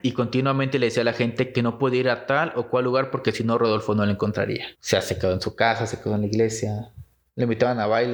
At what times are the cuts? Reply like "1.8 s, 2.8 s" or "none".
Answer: 4.7 s